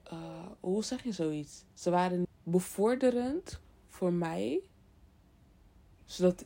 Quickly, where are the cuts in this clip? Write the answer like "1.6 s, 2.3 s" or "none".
1.7 s, 2.2 s